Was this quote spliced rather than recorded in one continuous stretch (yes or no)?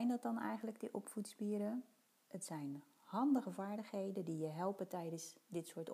no